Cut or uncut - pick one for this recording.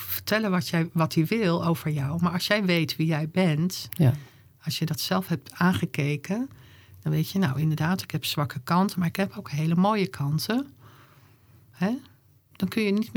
uncut